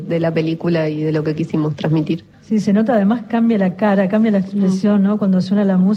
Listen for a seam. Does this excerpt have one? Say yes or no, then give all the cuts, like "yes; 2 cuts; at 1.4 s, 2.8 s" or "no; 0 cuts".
yes; 1 cut; at 2.3 s